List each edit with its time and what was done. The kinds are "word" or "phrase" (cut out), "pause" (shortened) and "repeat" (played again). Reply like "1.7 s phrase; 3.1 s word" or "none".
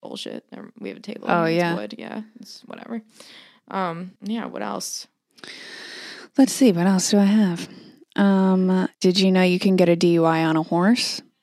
4.2 s pause; 8.9 s pause

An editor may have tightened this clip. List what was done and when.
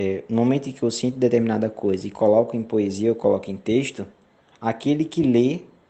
none

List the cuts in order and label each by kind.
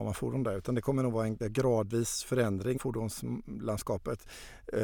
1.4 s word; 2.8 s word

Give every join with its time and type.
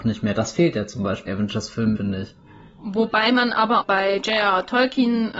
1.3 s word; 2.0 s word; 3.8 s word

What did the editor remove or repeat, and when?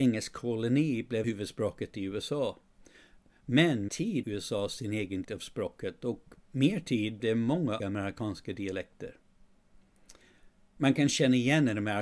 1.2 s word; 3.9 s word; 4.2 s word; 5.2 s word; 6.4 s word; 7.2 s word; 7.8 s word

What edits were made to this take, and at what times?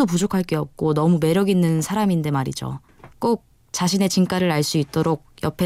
3.1 s pause

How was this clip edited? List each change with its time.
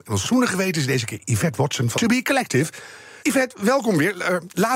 1.9 s word; 3.2 s pause

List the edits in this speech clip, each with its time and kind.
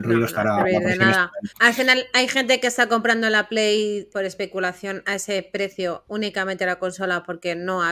1.5 s pause; 4.1 s word

